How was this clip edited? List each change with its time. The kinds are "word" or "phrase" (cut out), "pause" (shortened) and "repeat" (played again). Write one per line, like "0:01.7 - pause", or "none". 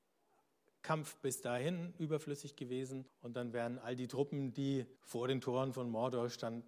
0:03.1 - pause
0:05.0 - pause